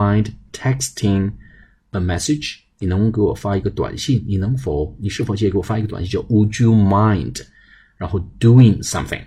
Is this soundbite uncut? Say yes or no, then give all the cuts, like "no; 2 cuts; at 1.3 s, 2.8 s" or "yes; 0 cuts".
yes; 0 cuts